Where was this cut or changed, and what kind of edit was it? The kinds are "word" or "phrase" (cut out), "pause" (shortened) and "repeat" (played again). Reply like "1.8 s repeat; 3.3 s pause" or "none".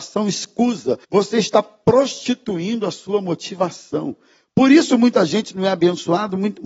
1.0 s pause